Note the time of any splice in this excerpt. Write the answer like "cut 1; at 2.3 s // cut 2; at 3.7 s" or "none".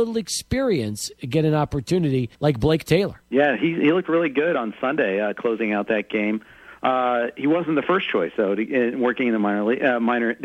cut 1; at 2.3 s // cut 2; at 3.2 s